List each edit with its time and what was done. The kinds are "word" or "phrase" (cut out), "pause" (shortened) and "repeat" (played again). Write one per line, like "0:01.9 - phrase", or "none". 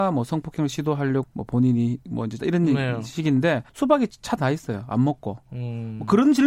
0:01.2 - word
0:02.4 - word
0:03.7 - pause
0:04.4 - word